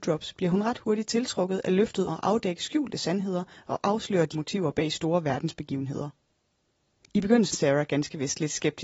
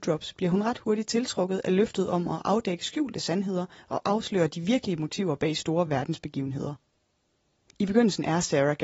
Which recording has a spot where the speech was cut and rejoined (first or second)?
first